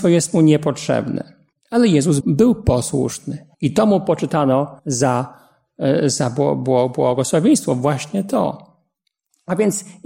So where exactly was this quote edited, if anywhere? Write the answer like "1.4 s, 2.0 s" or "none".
1.5 s, 2.2 s, 3.5 s, 4.8 s